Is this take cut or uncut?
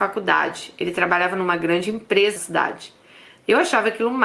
cut